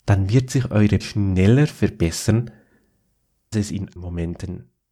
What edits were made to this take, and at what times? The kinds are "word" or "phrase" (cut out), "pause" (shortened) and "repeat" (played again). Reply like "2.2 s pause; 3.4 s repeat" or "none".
1.0 s phrase; 3.5 s word; 4.0 s word